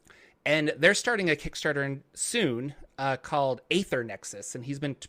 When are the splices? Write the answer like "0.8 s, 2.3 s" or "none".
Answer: none